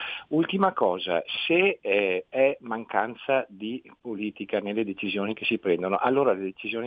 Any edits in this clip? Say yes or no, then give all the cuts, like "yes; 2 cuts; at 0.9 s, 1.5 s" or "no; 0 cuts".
no; 0 cuts